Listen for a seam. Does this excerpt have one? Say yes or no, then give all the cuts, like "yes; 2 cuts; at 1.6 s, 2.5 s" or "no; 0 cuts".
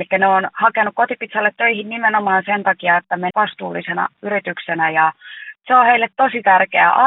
yes; 1 cut; at 3.3 s